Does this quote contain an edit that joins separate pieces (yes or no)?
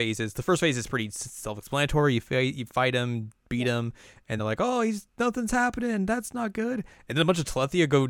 yes